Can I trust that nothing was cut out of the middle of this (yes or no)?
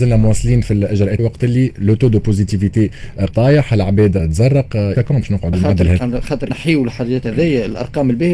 no